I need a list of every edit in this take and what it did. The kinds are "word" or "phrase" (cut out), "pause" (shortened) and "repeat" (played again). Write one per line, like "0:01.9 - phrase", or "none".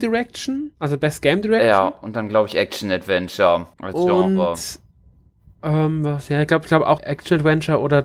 0:03.7 - pause
0:07.0 - phrase